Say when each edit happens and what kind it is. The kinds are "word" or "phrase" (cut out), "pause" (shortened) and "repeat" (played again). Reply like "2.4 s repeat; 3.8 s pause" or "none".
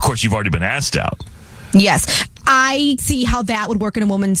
3.0 s word